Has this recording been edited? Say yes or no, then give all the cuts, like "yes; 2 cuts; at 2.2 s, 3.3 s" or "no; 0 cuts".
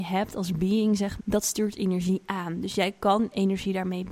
yes; 1 cut; at 1.2 s